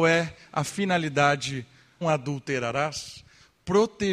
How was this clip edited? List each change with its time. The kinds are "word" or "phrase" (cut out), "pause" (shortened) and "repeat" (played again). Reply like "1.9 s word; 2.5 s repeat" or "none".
2.0 s phrase